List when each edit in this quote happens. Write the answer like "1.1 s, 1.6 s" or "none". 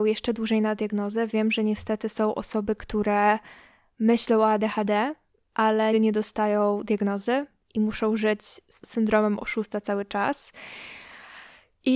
5.9 s, 8.8 s

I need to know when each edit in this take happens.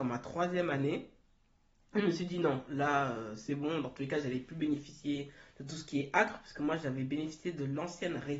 none

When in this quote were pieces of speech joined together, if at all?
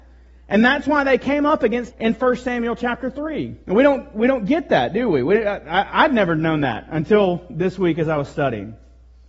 1.9 s, 3.6 s

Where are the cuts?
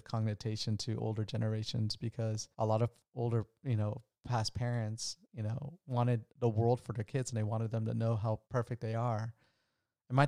2.5 s, 5.2 s, 6.3 s, 8.4 s

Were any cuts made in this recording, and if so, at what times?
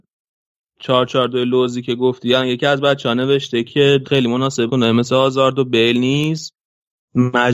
4.0 s, 4.7 s

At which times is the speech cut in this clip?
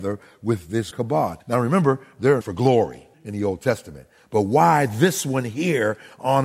0.9 s, 1.4 s, 2.4 s, 3.1 s

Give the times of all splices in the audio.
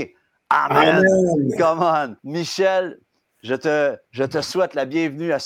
2.2 s, 4.0 s

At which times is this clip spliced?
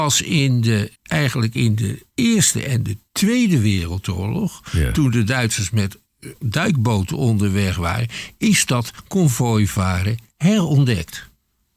1.0 s, 2.1 s

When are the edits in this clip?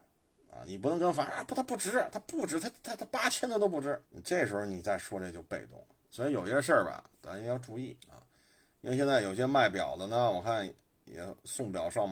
4.0 s, 8.0 s

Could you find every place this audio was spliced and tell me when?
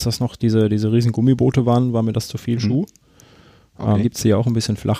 4.0 s

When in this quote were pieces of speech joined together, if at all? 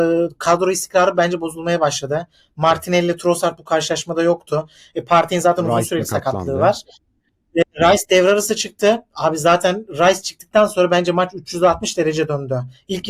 none

